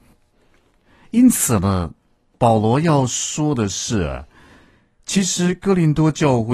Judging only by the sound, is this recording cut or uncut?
uncut